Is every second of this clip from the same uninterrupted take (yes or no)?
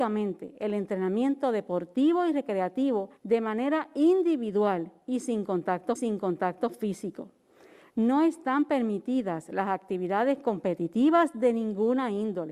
no